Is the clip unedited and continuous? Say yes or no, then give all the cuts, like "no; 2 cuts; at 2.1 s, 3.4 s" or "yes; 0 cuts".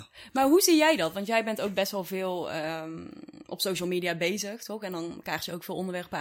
yes; 0 cuts